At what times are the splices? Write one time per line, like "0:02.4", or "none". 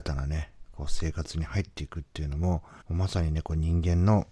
0:02.8